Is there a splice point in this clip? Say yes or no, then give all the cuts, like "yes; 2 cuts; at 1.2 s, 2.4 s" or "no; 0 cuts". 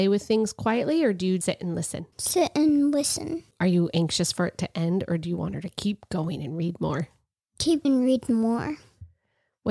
yes; 4 cuts; at 1.4 s, 2.1 s, 3.5 s, 7.8 s